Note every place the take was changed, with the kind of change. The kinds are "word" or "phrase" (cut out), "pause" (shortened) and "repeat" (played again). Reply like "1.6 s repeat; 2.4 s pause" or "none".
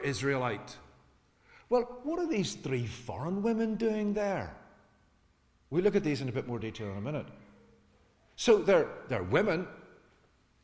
none